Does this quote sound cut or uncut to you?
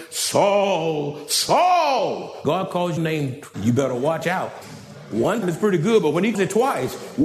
cut